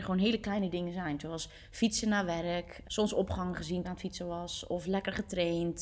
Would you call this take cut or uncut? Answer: cut